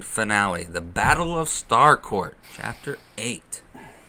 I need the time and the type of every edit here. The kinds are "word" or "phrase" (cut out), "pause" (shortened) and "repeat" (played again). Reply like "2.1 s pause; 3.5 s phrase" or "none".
2.4 s pause